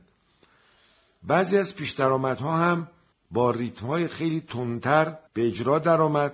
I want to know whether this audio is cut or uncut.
cut